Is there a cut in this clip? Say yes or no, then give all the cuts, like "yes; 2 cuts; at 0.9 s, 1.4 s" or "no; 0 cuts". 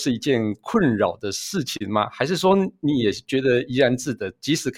no; 0 cuts